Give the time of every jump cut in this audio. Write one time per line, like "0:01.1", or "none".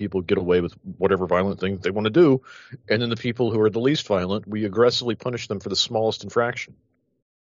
none